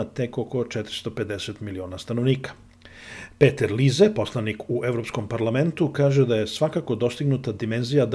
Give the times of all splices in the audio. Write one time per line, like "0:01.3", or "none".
none